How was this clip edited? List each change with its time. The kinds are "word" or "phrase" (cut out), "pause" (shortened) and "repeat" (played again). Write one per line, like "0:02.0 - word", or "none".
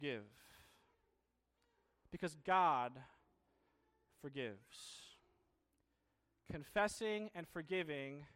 none